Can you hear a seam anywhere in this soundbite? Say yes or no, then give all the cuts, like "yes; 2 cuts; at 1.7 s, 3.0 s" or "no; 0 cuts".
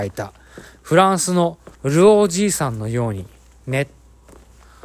yes; 1 cut; at 1.7 s